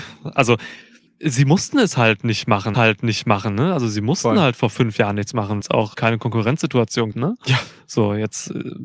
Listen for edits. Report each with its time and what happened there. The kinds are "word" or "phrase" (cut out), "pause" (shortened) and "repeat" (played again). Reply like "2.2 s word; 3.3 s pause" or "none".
1.1 s pause; 2.7 s repeat; 5.6 s word; 5.9 s word; 7.1 s word